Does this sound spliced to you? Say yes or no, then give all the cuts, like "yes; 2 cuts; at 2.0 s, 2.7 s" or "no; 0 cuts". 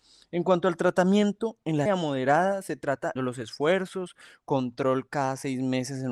yes; 2 cuts; at 1.9 s, 3.2 s